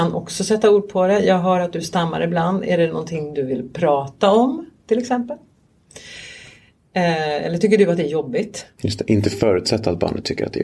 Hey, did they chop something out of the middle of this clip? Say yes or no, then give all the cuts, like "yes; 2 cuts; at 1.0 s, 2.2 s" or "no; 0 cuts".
no; 0 cuts